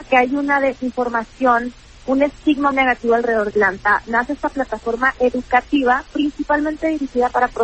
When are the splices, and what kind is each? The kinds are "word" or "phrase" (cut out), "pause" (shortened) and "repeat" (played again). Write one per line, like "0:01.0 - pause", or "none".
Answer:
0:02.7 - word
0:03.5 - word